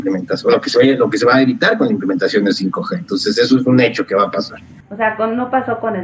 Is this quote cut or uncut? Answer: uncut